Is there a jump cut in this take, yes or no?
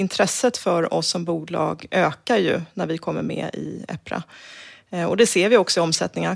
no